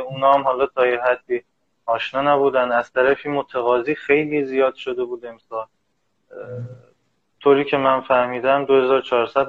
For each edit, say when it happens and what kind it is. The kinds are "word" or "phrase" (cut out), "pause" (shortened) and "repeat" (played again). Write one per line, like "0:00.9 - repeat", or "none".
none